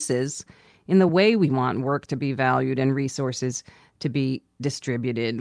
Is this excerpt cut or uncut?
uncut